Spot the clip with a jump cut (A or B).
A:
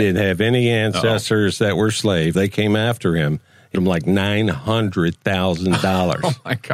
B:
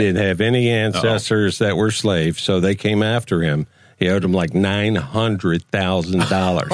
A